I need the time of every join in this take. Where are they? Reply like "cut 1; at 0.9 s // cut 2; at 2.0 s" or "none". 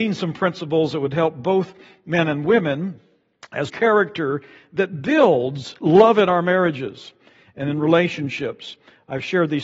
cut 1; at 3.7 s